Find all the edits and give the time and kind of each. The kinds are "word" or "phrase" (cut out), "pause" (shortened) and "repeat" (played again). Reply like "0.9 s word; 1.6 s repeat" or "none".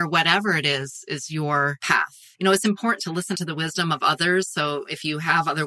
2.3 s pause; 3.0 s phrase; 3.3 s word